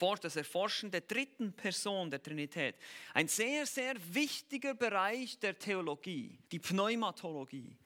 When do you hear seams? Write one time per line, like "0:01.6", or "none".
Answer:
0:06.5